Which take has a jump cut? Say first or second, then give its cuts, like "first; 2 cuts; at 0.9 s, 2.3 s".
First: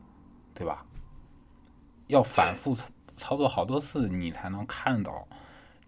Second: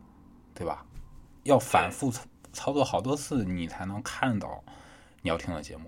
second; 1 cut; at 1.4 s